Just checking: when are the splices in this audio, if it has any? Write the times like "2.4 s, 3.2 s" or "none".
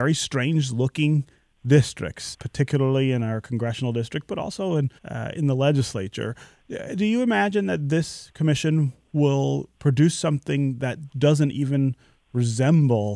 2.3 s, 5.0 s, 11.1 s